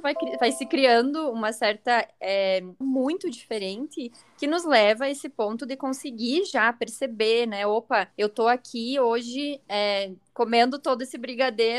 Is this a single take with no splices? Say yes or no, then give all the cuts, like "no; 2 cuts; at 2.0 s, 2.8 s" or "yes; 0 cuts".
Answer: no; 2 cuts; at 2.8 s, 8.1 s